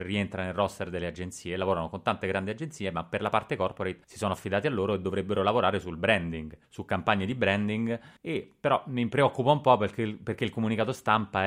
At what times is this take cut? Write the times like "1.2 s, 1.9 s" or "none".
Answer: 4.0 s, 6.6 s, 8.2 s